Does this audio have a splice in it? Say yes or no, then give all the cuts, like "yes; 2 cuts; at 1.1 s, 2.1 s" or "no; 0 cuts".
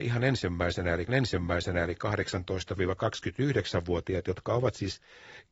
yes; 1 cut; at 1.1 s